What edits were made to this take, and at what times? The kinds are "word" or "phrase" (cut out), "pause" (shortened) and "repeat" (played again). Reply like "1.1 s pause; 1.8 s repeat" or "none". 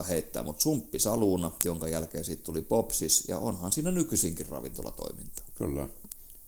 none

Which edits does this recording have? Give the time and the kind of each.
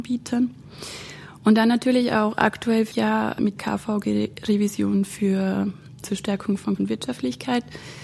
2.9 s word; 3.6 s word; 6.0 s word; 6.8 s word

